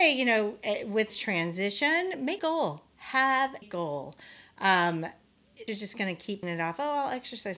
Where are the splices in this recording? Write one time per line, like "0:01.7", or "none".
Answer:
0:01.1
0:02.4
0:03.6
0:05.7
0:06.4